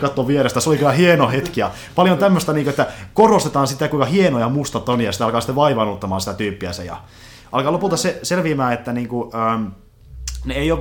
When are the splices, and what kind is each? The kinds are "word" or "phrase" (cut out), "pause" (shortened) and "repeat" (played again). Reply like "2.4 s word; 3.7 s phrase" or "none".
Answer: none